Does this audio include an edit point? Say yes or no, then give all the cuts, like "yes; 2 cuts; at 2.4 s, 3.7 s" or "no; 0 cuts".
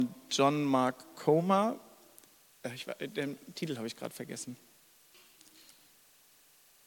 no; 0 cuts